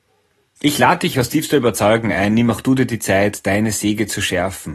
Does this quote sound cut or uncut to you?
cut